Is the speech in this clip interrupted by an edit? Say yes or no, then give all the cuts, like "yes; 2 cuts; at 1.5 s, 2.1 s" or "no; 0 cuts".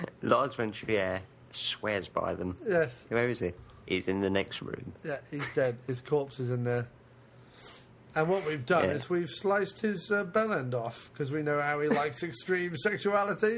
no; 0 cuts